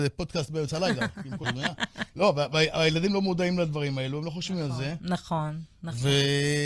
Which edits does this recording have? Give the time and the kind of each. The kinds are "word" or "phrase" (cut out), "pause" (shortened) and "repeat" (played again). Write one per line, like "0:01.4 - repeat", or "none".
0:01.4 - word